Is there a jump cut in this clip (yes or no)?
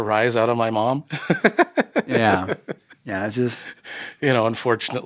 no